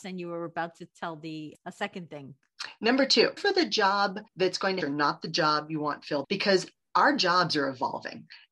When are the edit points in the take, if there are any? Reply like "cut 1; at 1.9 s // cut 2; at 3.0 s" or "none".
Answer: cut 1; at 1.5 s // cut 2; at 3.4 s // cut 3; at 4.3 s // cut 4; at 4.8 s // cut 5; at 6.2 s